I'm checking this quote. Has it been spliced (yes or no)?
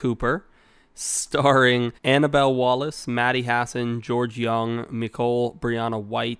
yes